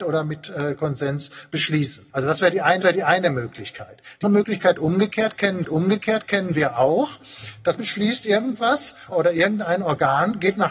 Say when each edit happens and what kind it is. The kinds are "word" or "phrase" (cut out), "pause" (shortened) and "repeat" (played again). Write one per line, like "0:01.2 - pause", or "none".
0:02.1 - pause
0:02.8 - repeat
0:04.2 - word
0:05.6 - repeat
0:07.8 - word
0:09.1 - phrase